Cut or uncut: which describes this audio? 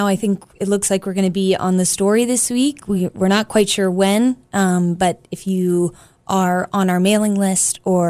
uncut